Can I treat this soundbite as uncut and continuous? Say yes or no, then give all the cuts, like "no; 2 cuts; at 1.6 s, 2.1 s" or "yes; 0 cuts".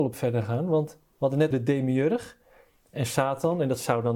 no; 1 cut; at 1.5 s